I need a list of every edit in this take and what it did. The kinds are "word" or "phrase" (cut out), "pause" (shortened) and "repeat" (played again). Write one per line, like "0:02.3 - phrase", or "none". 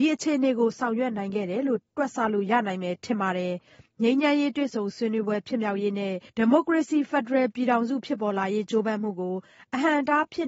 0:06.3 - pause